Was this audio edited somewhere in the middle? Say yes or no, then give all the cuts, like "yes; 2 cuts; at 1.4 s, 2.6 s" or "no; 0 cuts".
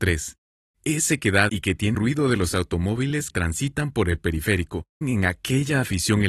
yes; 4 cuts; at 1.5 s, 1.9 s, 3.3 s, 5.0 s